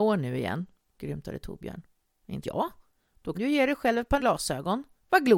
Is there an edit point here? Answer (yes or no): yes